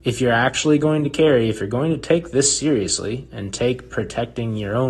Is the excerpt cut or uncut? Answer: uncut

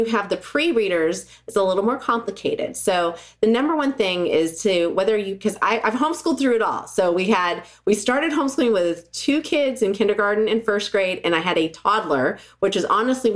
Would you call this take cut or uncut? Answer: uncut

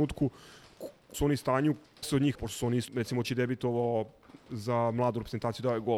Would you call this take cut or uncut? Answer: cut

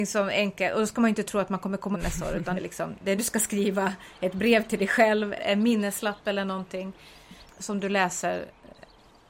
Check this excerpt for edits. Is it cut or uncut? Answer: cut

